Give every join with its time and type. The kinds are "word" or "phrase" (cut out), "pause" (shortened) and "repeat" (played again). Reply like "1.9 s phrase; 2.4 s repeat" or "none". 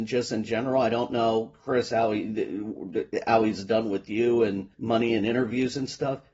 4.7 s pause